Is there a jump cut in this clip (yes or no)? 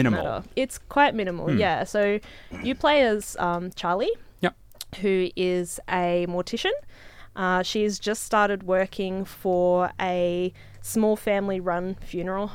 no